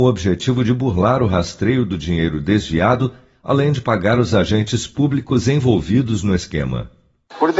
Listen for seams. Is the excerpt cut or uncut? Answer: uncut